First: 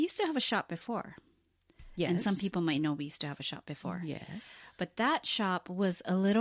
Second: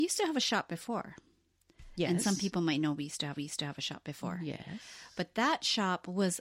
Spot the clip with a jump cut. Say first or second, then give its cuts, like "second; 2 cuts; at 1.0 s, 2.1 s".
second; 1 cut; at 3.4 s